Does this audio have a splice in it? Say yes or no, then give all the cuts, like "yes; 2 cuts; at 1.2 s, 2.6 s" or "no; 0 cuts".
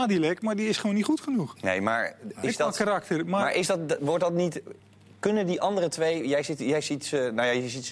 no; 0 cuts